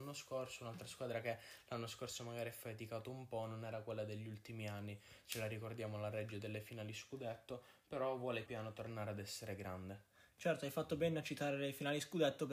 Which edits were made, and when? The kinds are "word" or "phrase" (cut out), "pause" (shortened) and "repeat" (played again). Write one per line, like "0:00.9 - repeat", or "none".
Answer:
0:08.5 - word